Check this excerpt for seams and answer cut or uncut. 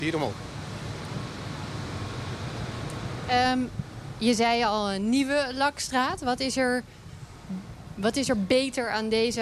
uncut